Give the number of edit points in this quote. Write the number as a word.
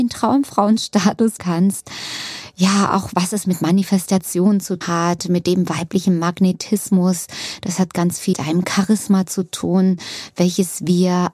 three